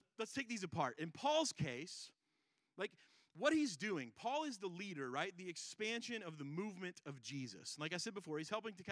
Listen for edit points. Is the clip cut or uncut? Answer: uncut